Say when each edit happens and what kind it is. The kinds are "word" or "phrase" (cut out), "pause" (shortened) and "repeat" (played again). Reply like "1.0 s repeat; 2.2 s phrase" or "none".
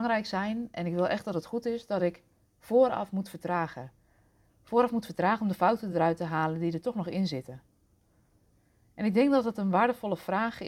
none